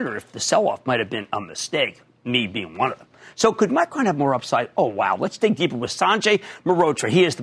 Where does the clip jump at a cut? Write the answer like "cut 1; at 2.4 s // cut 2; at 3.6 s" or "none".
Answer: none